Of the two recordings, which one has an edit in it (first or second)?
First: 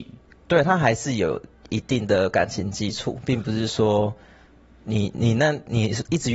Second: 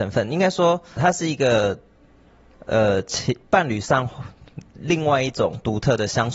second